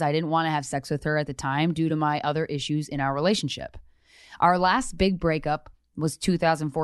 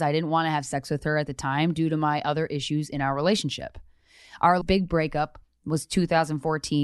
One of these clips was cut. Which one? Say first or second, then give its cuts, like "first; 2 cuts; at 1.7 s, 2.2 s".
second; 1 cut; at 4.6 s